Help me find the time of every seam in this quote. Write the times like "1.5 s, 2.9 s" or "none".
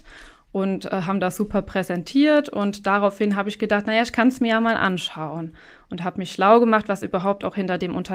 none